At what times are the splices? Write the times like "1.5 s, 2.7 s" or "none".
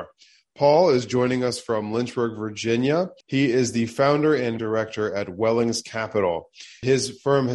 3.2 s, 4.6 s